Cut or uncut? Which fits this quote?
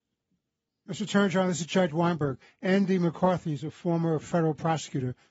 cut